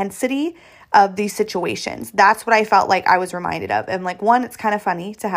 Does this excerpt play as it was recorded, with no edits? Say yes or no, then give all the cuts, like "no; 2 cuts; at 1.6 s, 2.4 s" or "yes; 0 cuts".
yes; 0 cuts